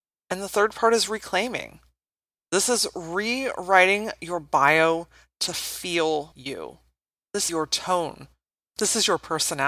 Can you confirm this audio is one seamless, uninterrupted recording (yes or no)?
no